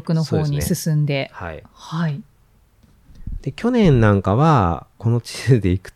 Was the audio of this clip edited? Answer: no; 0 cuts

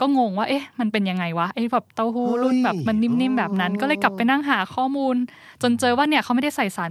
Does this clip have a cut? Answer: yes; 1 cut; at 1.9 s

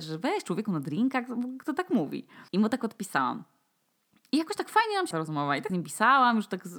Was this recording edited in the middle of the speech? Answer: yes; 3 cuts; at 2.5 s, 5.1 s, 5.7 s

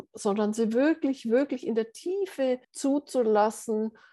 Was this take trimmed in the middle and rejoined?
yes; 1 cut; at 2.6 s

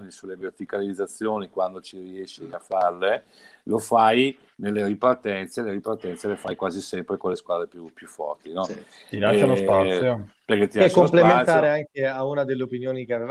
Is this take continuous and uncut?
yes; 0 cuts

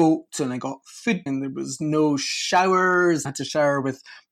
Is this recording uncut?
no; 2 cuts; at 1.3 s, 3.2 s

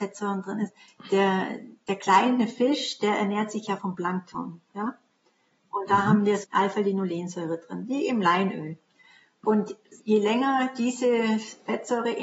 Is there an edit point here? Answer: yes; 3 cuts; at 3.8 s, 6.4 s, 10.0 s

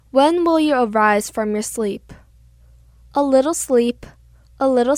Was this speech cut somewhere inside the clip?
no; 0 cuts

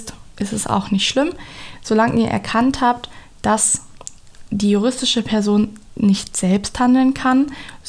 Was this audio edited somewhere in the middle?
no; 0 cuts

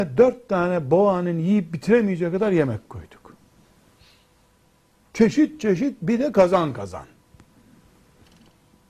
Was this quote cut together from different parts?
no; 0 cuts

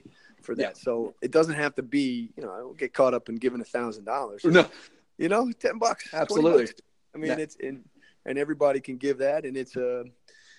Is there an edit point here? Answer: yes; 1 cut; at 1.2 s

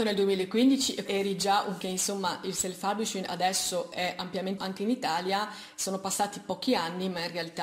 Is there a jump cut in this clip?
yes; 3 cuts; at 1.1 s, 1.8 s, 4.6 s

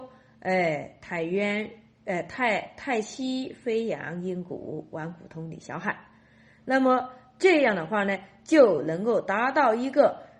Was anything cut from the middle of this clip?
no; 0 cuts

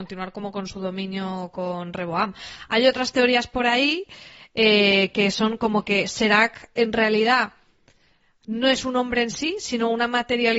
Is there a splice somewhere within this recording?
no; 0 cuts

